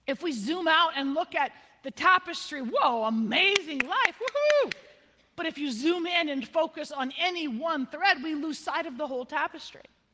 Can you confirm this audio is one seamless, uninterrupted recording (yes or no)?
yes